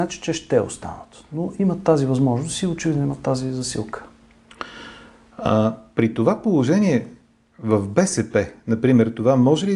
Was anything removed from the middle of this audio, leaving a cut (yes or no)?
no